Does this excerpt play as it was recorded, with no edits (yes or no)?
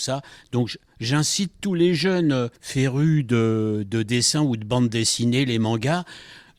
no